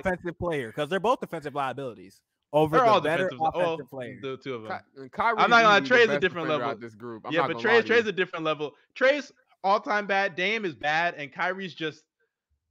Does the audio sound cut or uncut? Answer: uncut